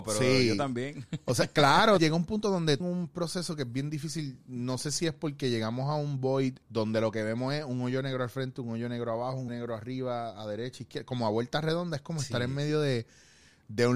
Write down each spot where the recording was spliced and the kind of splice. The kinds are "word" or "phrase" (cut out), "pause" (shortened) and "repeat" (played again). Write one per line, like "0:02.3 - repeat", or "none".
0:02.0 - word
0:02.8 - phrase
0:06.6 - pause
0:09.5 - word